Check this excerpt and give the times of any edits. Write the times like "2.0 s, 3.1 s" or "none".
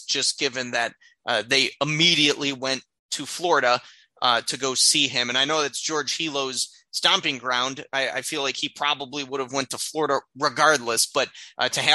none